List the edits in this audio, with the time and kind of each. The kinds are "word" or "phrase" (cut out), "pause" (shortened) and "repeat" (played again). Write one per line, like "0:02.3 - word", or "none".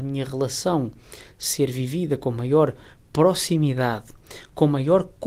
none